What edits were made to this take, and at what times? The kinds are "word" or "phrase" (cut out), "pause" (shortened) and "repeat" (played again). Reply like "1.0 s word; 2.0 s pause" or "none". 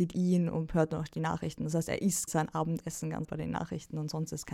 2.3 s word; 3.2 s word